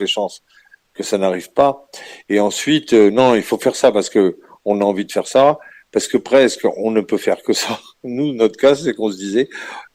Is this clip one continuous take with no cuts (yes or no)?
yes